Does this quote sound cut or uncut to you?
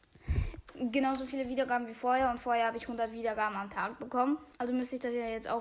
cut